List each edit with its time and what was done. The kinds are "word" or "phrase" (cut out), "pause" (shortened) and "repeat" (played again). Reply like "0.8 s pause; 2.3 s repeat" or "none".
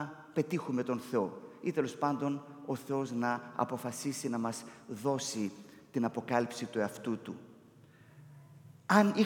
none